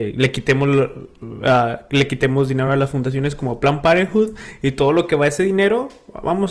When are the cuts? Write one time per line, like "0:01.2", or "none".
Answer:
none